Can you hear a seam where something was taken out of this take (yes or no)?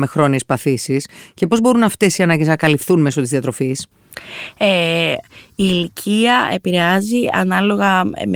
no